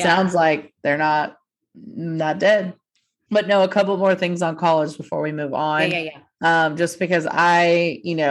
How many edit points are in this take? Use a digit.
0